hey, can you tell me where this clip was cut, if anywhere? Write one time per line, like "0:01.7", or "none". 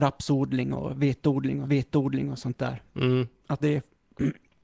0:01.6
0:03.6